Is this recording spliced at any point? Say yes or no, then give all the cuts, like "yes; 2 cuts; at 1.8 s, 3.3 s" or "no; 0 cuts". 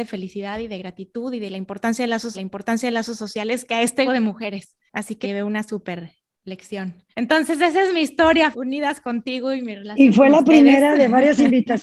yes; 6 cuts; at 2.3 s, 4.1 s, 4.9 s, 5.2 s, 7.1 s, 8.5 s